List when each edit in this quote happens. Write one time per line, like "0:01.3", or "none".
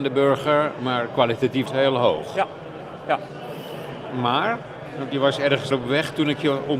0:01.7
0:05.1
0:05.7